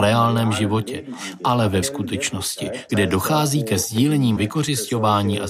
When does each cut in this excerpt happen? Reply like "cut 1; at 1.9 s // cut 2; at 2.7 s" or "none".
cut 1; at 1.8 s // cut 2; at 2.9 s // cut 3; at 4.4 s